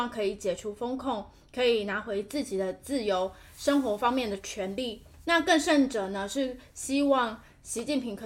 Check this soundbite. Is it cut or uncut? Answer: uncut